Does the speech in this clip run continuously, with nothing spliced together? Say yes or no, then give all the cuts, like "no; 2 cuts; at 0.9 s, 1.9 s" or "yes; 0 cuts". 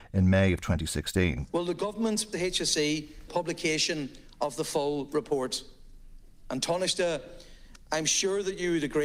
no; 2 cuts; at 2.3 s, 3.3 s